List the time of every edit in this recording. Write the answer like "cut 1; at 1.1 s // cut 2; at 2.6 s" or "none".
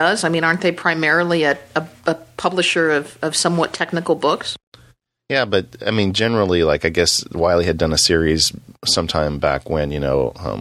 none

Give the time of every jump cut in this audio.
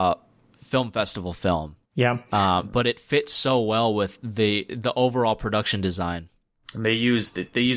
cut 1; at 1.8 s

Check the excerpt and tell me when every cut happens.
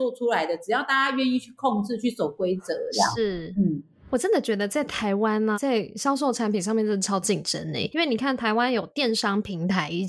cut 1; at 5.5 s // cut 2; at 7.9 s

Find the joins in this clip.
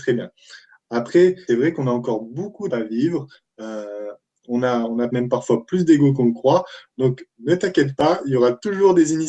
cut 1; at 1.5 s // cut 2; at 2.7 s // cut 3; at 5.1 s

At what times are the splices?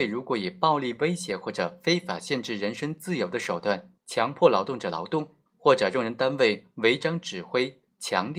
cut 1; at 4.0 s // cut 2; at 5.5 s

